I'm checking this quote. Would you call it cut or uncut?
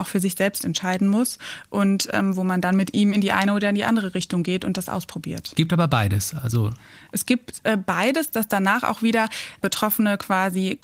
uncut